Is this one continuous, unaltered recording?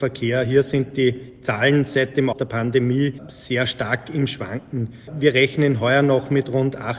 no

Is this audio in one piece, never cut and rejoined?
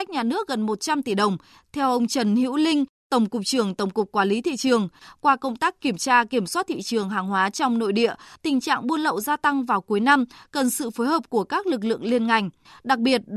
yes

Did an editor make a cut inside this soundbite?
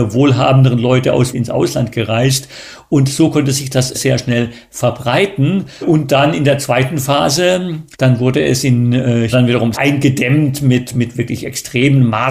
yes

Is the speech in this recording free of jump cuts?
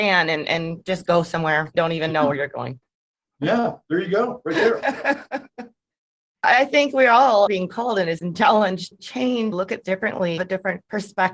no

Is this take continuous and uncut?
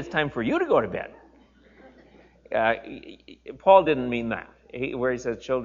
yes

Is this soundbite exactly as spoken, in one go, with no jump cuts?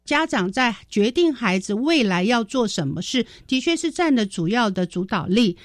yes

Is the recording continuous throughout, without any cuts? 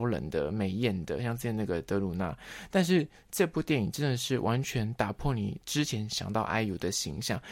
yes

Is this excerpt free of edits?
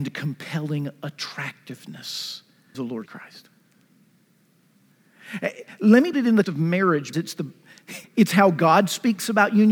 no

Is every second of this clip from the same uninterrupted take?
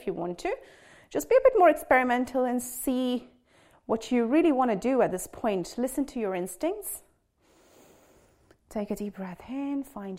yes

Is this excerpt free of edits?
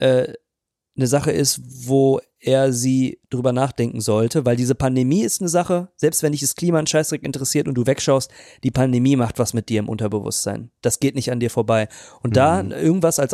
yes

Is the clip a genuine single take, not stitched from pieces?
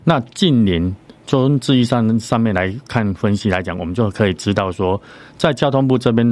yes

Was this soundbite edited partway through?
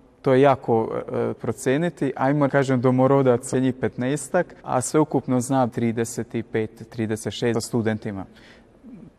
yes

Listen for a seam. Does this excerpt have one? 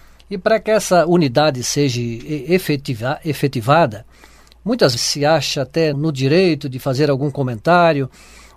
yes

